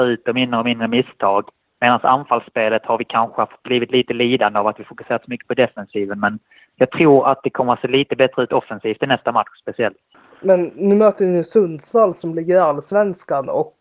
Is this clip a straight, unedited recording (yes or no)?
yes